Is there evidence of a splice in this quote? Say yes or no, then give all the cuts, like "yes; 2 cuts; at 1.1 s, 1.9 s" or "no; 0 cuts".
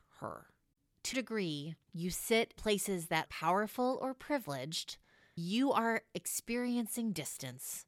yes; 4 cuts; at 1.1 s, 2.6 s, 3.3 s, 5.4 s